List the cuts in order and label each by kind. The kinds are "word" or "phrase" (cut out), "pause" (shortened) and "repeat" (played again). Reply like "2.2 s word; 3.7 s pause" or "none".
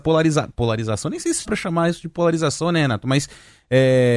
1.4 s word